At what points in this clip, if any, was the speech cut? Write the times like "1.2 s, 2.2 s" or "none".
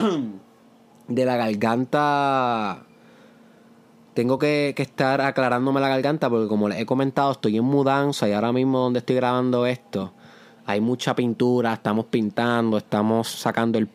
none